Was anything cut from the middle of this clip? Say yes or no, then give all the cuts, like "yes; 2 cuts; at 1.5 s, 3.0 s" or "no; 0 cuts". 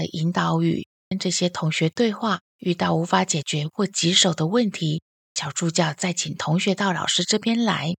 yes; 1 cut; at 2.5 s